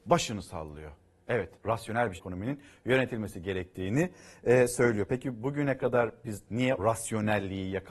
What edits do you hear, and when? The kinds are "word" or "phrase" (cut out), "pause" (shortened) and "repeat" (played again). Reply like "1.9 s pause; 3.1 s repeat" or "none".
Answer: 1.6 s pause; 2.2 s word; 6.8 s word